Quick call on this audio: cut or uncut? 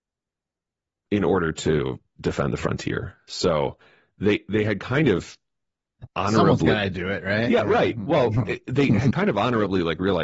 uncut